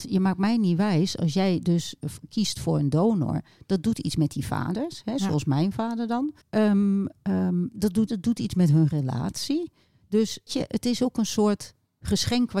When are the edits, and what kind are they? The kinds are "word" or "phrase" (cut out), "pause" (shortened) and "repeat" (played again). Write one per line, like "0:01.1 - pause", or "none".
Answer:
0:06.4 - pause
0:08.1 - phrase
0:10.5 - word